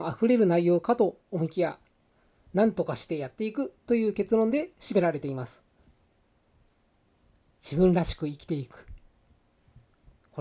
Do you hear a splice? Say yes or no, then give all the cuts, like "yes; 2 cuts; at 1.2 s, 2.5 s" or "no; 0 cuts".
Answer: no; 0 cuts